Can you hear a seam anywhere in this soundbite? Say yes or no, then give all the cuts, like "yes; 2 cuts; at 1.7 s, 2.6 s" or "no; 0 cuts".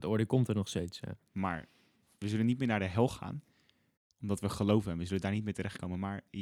no; 0 cuts